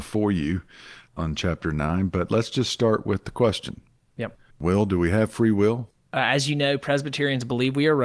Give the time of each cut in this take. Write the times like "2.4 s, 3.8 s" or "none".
1.1 s